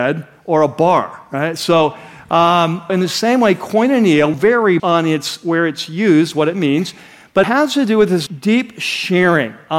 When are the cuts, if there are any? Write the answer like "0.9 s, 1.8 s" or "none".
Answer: 2.9 s, 4.3 s, 4.8 s, 7.4 s, 8.3 s